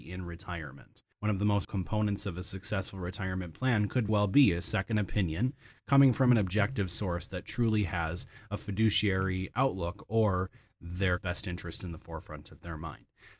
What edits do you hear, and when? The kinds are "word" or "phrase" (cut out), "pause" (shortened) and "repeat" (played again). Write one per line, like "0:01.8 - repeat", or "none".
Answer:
0:01.1 - pause
0:01.6 - word
0:04.1 - word
0:09.5 - word
0:11.2 - word